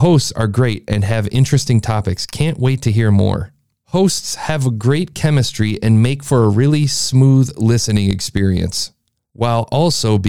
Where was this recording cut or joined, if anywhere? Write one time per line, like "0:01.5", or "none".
none